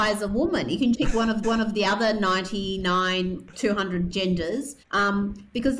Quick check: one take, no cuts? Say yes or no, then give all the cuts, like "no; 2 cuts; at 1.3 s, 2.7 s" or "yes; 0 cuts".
no; 4 cuts; at 0.9 s, 1.4 s, 3.5 s, 4.8 s